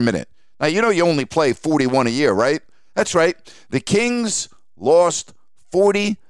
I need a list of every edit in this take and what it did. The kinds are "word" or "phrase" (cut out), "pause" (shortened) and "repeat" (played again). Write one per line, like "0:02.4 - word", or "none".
none

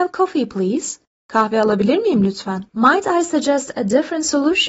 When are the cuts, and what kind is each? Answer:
0:02.7 - pause

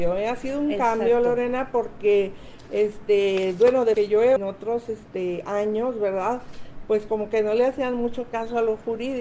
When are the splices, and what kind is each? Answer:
0:03.9 - word
0:04.4 - phrase

